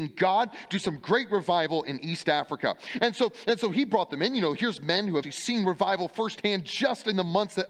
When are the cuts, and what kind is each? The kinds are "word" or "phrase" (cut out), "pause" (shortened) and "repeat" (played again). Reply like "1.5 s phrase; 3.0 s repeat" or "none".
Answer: 5.2 s word

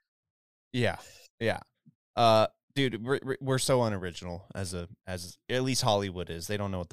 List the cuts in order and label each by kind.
none

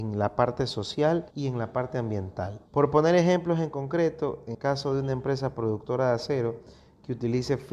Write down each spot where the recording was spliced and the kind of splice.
1.3 s pause; 2.7 s pause; 4.5 s word

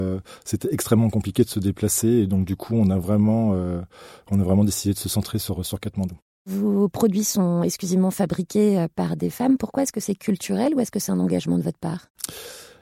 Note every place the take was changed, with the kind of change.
none

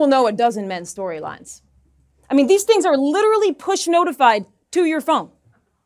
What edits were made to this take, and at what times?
none

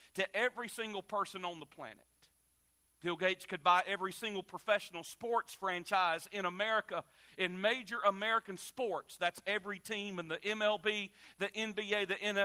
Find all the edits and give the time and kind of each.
none

